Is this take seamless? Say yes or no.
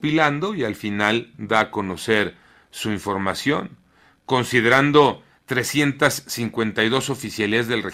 yes